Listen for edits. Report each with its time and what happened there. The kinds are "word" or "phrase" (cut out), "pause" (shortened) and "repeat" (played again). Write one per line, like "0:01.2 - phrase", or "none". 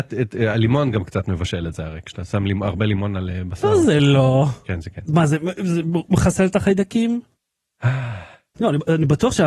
none